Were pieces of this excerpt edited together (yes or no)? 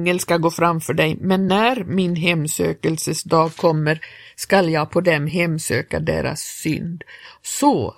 no